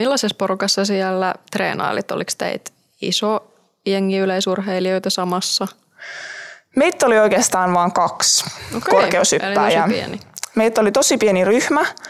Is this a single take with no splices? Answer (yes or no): yes